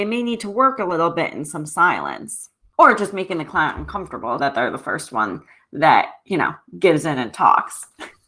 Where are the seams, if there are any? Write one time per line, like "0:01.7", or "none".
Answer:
0:04.4